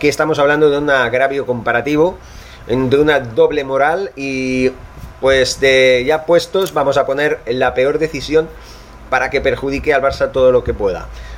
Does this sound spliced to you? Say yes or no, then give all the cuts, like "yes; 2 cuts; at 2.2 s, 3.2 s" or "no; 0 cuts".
no; 0 cuts